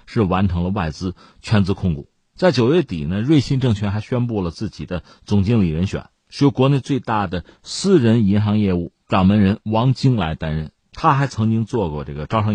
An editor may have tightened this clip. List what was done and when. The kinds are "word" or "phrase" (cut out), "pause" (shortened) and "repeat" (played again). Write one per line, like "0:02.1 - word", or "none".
0:09.0 - pause